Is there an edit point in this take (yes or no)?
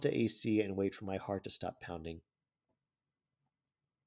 no